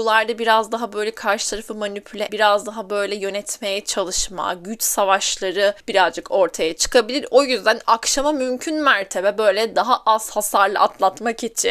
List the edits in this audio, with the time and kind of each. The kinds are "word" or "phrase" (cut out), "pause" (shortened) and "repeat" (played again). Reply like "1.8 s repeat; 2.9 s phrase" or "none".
2.3 s word; 5.8 s pause